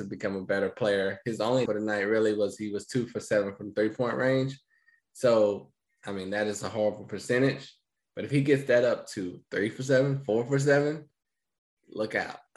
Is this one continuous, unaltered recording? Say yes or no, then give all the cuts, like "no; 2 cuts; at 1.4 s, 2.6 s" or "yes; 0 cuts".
no; 1 cut; at 1.7 s